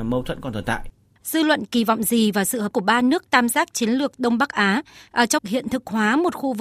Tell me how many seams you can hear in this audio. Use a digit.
3